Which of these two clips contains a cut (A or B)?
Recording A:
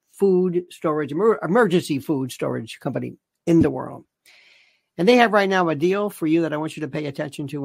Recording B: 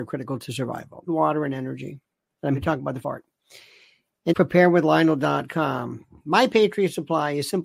B